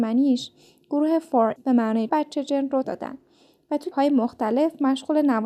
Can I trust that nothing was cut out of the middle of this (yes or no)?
no